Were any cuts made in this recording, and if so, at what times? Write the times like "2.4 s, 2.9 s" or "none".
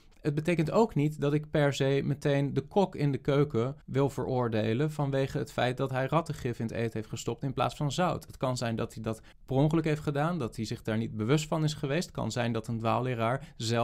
3.8 s, 9.3 s